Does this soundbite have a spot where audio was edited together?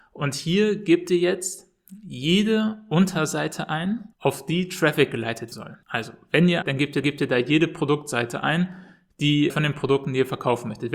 yes; 6 cuts; at 4.1 s, 5.5 s, 5.8 s, 6.6 s, 7.0 s, 9.5 s

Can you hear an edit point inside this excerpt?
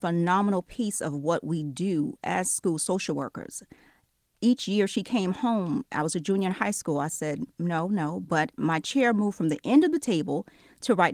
no; 0 cuts

